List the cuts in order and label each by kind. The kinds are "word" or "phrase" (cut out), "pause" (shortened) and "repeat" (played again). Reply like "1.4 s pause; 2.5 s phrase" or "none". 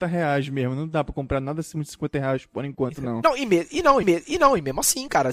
4.0 s repeat